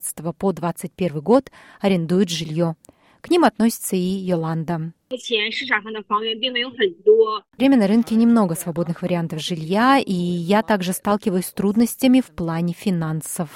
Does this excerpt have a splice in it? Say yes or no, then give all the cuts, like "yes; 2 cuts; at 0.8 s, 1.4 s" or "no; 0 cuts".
yes; 1 cut; at 7.6 s